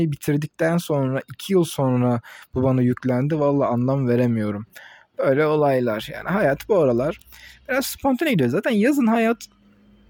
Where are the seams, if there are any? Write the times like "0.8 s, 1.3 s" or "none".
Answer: none